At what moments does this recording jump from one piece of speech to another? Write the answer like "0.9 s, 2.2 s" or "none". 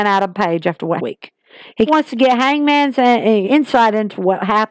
1.0 s, 1.9 s, 3.4 s